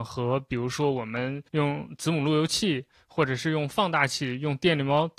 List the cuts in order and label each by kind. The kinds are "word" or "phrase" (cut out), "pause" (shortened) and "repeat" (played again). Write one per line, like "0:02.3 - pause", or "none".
0:01.5 - pause